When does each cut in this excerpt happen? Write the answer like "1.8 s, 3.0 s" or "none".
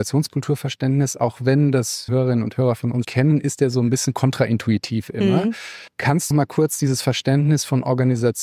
2.1 s, 3.0 s, 5.9 s, 6.3 s

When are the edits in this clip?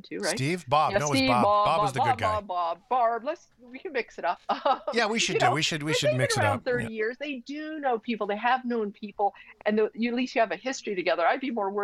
4.4 s

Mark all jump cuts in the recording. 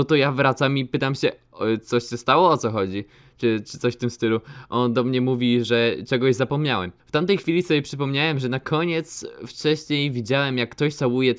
7.0 s

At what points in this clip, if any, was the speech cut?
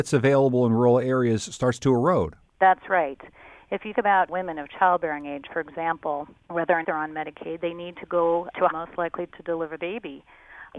3.9 s, 6.8 s, 8.7 s, 9.8 s

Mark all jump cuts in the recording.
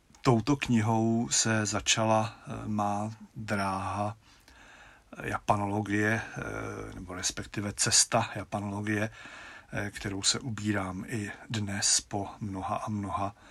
none

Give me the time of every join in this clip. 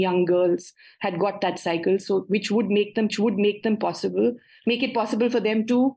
3.1 s

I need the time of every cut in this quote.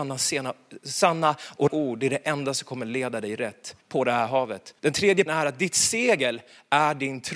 1.7 s, 3.8 s, 4.8 s, 5.3 s

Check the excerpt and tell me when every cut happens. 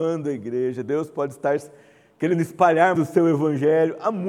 3.0 s

